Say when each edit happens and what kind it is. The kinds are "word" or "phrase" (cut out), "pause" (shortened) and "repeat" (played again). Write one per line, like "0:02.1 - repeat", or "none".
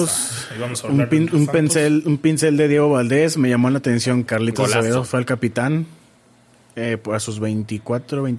0:04.3 - word